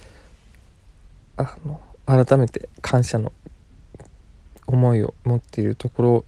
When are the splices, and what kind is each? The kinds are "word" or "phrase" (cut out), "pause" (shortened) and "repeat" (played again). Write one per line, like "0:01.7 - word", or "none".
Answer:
none